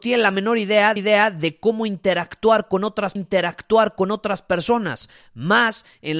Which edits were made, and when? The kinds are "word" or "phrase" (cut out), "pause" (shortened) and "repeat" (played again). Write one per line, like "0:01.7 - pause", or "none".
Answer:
0:01.0 - repeat
0:03.2 - repeat